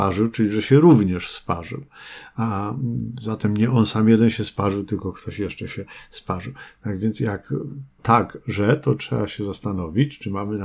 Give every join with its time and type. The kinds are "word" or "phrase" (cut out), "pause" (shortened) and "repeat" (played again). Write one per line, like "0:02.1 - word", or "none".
0:08.0 - phrase

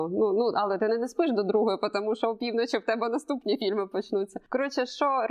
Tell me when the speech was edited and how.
none

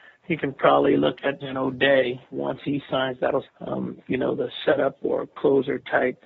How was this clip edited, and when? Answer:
0:01.4 - word
0:02.3 - word
0:03.4 - phrase

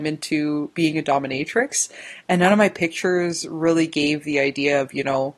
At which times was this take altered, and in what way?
none

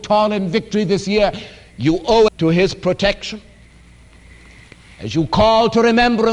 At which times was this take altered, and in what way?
0:02.3 - word

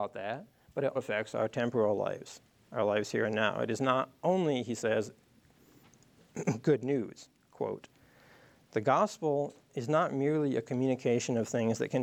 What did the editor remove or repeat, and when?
0:01.0 - word

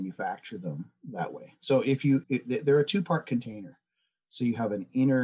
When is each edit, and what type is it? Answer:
0:02.2 - word

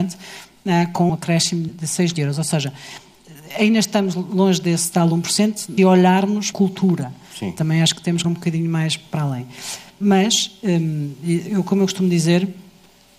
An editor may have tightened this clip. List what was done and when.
0:01.1 - word
0:01.7 - word
0:02.1 - word
0:05.8 - word
0:06.5 - phrase
0:08.2 - word

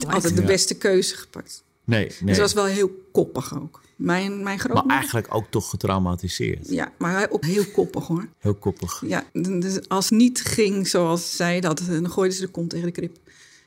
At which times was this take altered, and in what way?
0:07.4 - word
0:08.3 - pause
0:09.3 - pause
0:10.1 - word

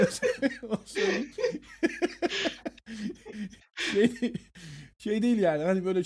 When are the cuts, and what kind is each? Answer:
none

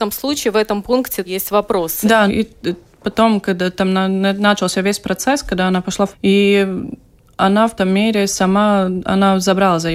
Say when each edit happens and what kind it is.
0:01.3 - word
0:02.3 - word
0:06.1 - word
0:07.8 - word

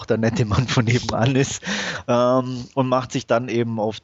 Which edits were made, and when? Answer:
none

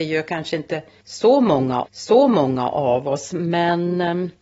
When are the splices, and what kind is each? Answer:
0:01.8 - repeat

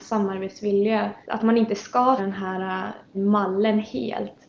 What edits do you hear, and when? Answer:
0:01.2 - pause
0:02.2 - word
0:03.1 - word

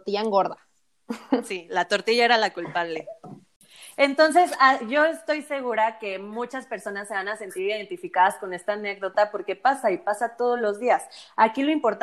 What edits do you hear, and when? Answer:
none

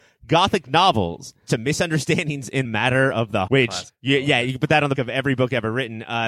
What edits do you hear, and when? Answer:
0:01.5 - word
0:02.6 - word
0:03.5 - word
0:03.9 - word
0:04.9 - word

